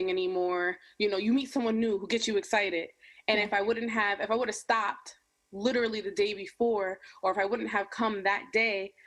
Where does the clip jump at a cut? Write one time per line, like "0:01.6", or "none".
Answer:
none